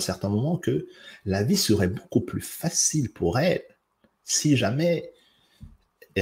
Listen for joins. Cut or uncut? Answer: uncut